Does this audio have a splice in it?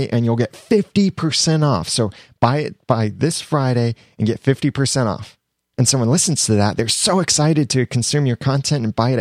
no; 0 cuts

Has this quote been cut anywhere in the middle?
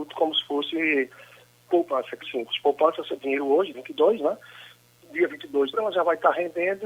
yes; 4 cuts; at 2.2 s, 3.2 s, 3.7 s, 5.7 s

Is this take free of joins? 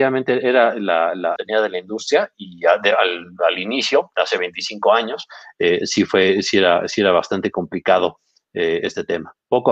no; 2 cuts; at 1.4 s, 2.3 s

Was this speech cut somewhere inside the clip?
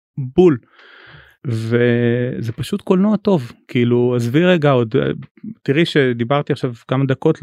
no; 0 cuts

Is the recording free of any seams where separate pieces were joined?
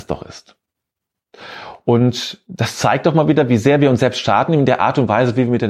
yes; 0 cuts

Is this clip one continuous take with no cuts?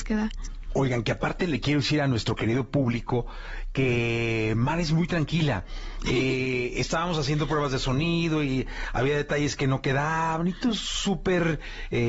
yes; 0 cuts

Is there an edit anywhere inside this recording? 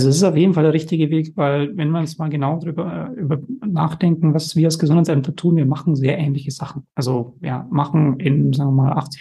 yes; 1 cut; at 6.9 s

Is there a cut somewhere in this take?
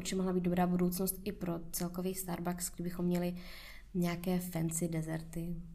no; 0 cuts

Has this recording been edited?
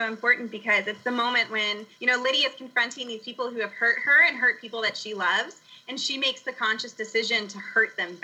yes; 1 cut; at 1.9 s

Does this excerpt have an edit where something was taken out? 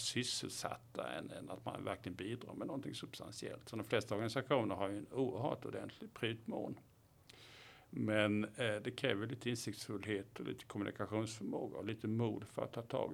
no; 0 cuts

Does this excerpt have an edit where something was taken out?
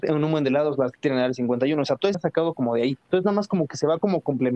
yes; 3 cuts; at 0.9 s, 2.1 s, 3.0 s

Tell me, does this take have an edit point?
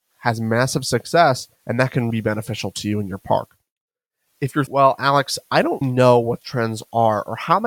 yes; 6 cuts; at 1.6 s, 2.1 s, 3.8 s, 4.7 s, 5.8 s, 6.4 s

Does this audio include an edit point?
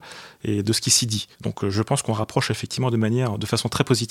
yes; 1 cut; at 1.3 s

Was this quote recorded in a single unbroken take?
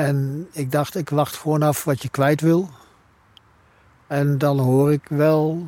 yes; 0 cuts

